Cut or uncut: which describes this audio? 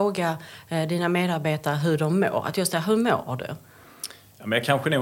uncut